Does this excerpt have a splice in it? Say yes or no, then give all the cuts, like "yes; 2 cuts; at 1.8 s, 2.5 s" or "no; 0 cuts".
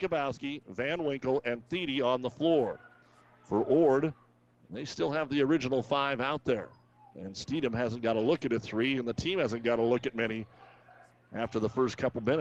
no; 0 cuts